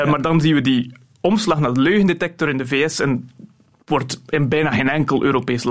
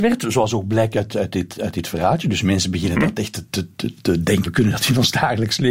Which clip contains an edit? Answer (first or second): second